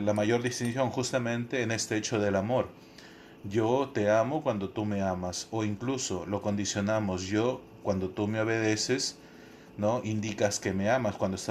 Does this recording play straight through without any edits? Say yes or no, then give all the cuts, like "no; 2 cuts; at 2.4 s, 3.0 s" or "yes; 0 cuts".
yes; 0 cuts